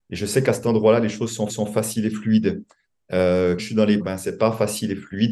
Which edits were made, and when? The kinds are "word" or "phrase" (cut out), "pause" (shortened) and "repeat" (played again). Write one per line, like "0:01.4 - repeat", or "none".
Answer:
0:01.5 - repeat
0:03.6 - word
0:04.0 - word